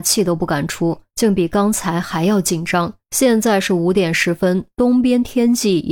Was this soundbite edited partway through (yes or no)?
yes